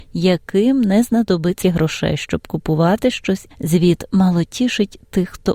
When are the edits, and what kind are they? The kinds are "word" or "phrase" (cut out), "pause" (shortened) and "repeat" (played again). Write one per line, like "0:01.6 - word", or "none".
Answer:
0:01.6 - word
0:03.5 - word